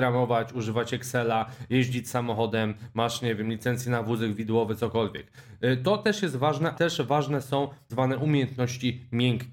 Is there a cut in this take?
yes; 2 cuts; at 6.7 s, 7.9 s

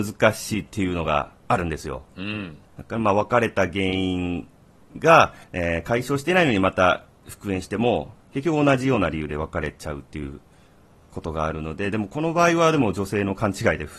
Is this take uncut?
no; 2 cuts; at 2.6 s, 5.4 s

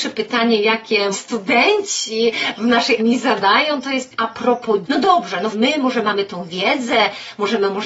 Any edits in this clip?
yes; 5 cuts; at 1.1 s, 3.0 s, 4.1 s, 4.8 s, 5.5 s

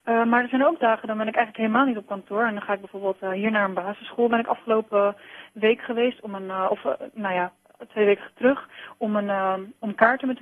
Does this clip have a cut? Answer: no; 0 cuts

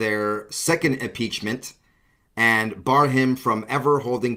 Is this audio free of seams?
yes; 0 cuts

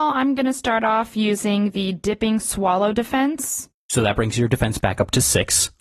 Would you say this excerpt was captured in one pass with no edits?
yes; 0 cuts

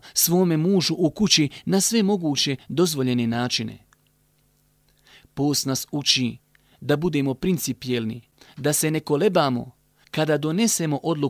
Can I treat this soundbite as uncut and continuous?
yes; 0 cuts

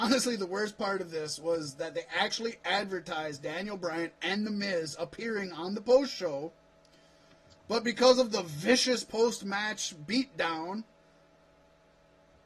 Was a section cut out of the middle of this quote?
no; 0 cuts

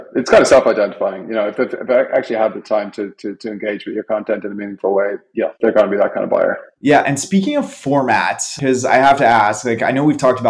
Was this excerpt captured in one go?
no; 2 cuts; at 5.6 s, 6.8 s

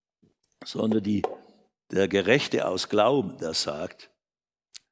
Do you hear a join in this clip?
no; 0 cuts

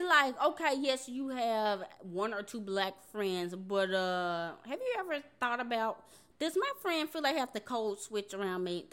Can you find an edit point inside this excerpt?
no; 0 cuts

